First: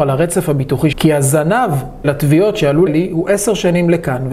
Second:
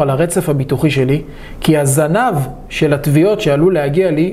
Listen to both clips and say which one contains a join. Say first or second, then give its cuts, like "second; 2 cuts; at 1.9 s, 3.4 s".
first; 3 cuts; at 0.9 s, 2.0 s, 2.9 s